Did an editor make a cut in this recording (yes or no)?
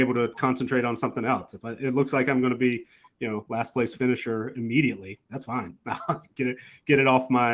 no